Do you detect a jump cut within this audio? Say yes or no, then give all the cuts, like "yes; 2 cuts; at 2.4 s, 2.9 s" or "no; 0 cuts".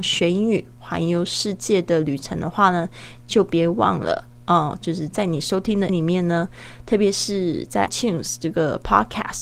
yes; 2 cuts; at 5.9 s, 7.9 s